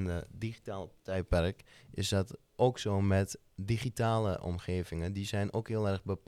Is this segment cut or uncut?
uncut